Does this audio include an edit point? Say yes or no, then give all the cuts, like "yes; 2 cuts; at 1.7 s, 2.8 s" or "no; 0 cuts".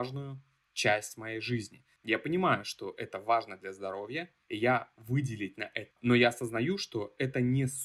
yes; 3 cuts; at 4.4 s, 4.9 s, 5.9 s